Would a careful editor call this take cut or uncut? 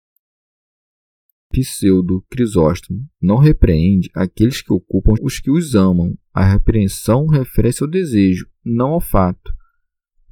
cut